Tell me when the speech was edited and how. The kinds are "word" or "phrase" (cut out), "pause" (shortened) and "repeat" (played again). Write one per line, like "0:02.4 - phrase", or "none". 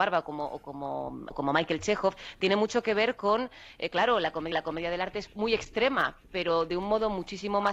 0:01.3 - word
0:04.5 - repeat
0:05.3 - word